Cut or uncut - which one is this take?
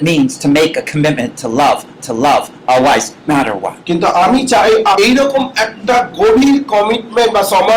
cut